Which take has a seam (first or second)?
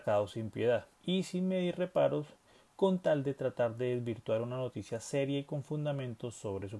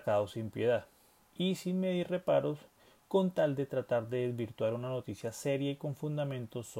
first